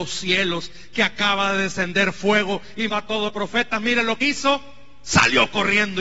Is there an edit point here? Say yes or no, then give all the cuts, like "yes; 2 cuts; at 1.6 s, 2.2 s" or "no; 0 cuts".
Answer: yes; 3 cuts; at 2.9 s, 3.3 s, 4.2 s